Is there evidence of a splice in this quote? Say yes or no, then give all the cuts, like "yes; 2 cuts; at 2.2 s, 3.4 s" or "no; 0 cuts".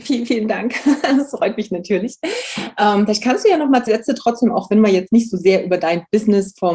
yes; 1 cut; at 3.9 s